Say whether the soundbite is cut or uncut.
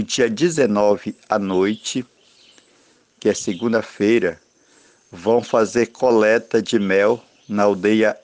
uncut